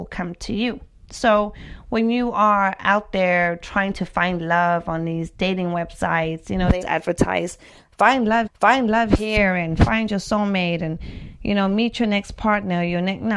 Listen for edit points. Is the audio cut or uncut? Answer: cut